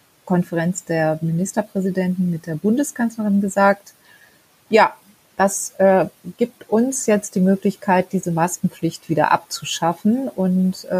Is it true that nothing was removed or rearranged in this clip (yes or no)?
yes